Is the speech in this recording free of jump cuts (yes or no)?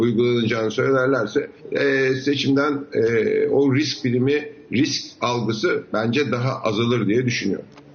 no